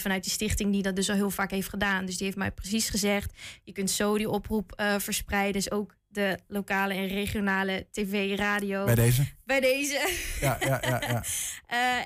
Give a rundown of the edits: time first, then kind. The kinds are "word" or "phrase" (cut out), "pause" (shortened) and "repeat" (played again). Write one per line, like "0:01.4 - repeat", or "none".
none